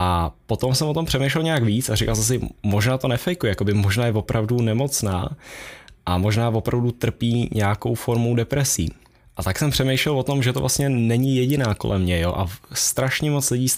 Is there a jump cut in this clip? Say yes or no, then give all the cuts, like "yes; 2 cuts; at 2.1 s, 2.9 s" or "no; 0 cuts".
no; 0 cuts